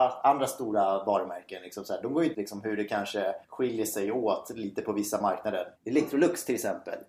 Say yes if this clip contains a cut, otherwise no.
yes